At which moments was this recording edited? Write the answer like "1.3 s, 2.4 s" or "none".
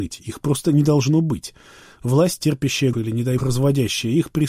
2.9 s, 3.4 s

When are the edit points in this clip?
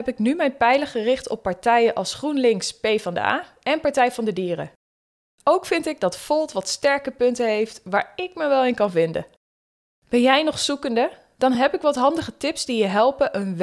none

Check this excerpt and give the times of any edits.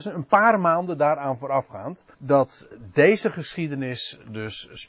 2.1 s

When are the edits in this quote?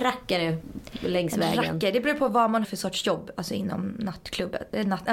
2.6 s

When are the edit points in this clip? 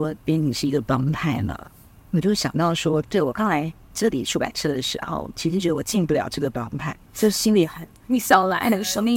1.9 s, 7.0 s

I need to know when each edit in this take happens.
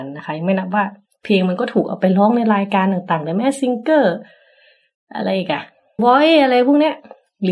6.0 s

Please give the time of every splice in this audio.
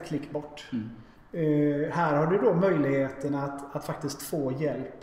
none

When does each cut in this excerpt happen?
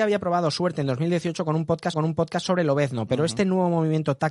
1.9 s

